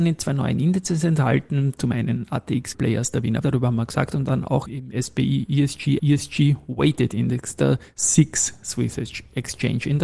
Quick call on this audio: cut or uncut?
cut